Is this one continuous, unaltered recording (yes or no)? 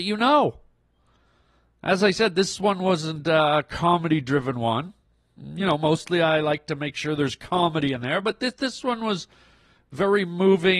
yes